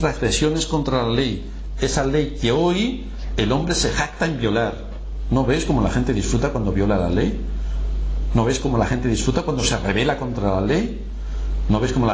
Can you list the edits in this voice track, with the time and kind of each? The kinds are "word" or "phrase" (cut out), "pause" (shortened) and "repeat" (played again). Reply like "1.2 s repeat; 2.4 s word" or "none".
none